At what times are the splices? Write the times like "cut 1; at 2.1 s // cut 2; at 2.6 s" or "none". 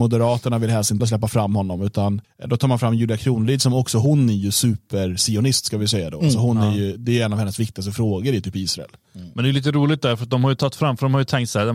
cut 1; at 1.0 s // cut 2; at 2.2 s